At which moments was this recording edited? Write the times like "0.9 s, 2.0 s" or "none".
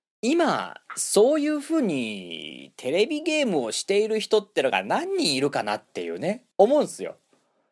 6.5 s